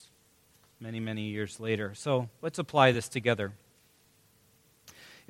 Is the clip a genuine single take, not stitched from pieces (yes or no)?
yes